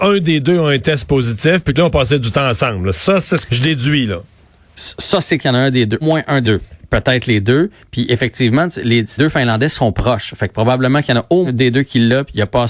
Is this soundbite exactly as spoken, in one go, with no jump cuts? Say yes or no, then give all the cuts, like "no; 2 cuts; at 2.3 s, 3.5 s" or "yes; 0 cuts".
no; 7 cuts; at 1.7 s, 3.5 s, 5.4 s, 6.0 s, 6.4 s, 9.2 s, 11.4 s